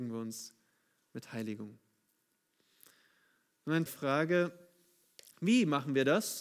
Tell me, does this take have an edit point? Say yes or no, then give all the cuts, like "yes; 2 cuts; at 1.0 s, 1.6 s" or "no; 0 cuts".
yes; 1 cut; at 3.9 s